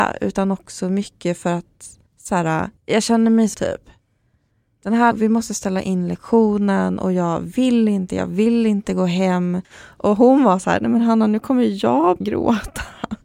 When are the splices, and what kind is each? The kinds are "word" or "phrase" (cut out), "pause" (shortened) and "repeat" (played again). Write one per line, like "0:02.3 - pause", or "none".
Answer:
0:02.1 - pause
0:02.8 - pause
0:03.5 - word
0:05.1 - word
0:09.6 - pause
0:12.2 - word